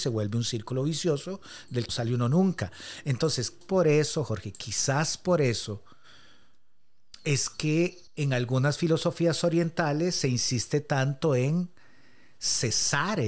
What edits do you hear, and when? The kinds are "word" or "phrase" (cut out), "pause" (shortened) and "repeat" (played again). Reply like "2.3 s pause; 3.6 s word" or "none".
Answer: 1.9 s word; 3.6 s word; 8.1 s pause